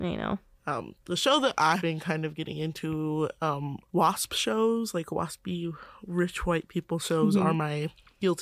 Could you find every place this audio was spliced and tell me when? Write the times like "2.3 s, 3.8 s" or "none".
1.8 s, 3.9 s